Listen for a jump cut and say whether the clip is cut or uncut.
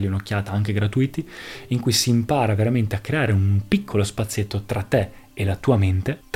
uncut